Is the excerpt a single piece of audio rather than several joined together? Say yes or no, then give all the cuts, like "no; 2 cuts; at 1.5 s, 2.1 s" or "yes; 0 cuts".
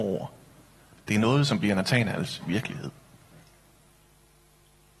yes; 0 cuts